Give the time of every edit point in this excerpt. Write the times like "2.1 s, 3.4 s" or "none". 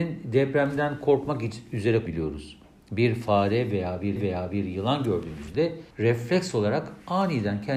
2.1 s, 4.2 s, 5.9 s